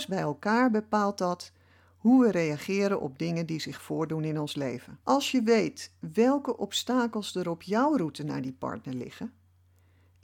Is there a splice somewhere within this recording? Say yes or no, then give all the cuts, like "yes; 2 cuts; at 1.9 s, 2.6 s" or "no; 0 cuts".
yes; 1 cut; at 5.0 s